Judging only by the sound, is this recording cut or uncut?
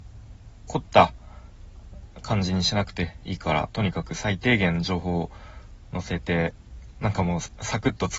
uncut